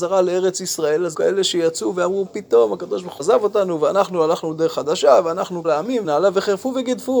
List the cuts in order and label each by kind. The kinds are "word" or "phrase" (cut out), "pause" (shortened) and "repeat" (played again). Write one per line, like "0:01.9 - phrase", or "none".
0:01.1 - word
0:02.3 - word
0:03.2 - word
0:05.6 - word
0:06.0 - word